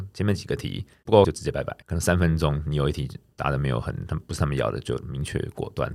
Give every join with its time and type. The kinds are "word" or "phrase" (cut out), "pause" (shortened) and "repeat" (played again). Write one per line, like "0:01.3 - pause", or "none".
0:01.2 - word
0:01.8 - pause